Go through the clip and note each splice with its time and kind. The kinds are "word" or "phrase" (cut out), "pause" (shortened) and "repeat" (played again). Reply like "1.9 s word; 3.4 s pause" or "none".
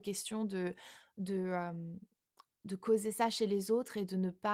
none